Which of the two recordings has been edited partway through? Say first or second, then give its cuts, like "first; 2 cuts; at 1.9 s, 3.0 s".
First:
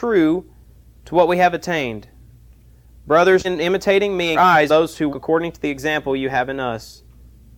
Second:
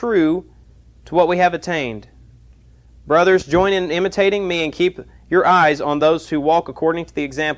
first; 4 cuts; at 3.4 s, 4.3 s, 4.7 s, 5.1 s